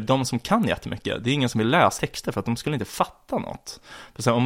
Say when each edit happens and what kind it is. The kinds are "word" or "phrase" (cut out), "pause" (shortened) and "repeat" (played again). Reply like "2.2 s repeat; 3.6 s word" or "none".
2.0 s word